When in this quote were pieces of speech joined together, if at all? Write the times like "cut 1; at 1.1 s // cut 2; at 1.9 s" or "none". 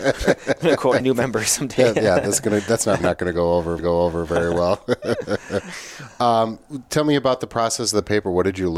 cut 1; at 1.0 s // cut 2; at 3.0 s // cut 3; at 3.8 s